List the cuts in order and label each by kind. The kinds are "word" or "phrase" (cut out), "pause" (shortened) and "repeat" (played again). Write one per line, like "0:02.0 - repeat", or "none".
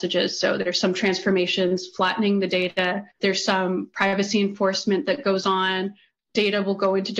0:03.1 - pause